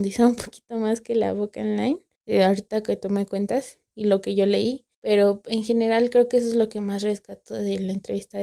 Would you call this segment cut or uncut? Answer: cut